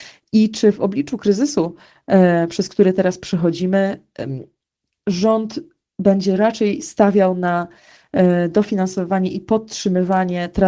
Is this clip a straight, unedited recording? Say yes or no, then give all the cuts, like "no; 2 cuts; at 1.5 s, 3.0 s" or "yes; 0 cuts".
yes; 0 cuts